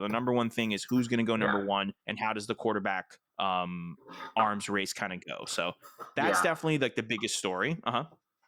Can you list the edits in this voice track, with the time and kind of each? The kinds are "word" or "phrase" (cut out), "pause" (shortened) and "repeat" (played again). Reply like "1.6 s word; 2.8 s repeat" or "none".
2.0 s pause; 3.3 s pause